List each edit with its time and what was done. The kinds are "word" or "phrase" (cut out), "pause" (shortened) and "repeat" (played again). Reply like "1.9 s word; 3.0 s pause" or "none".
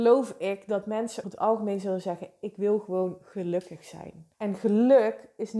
1.2 s word; 4.3 s pause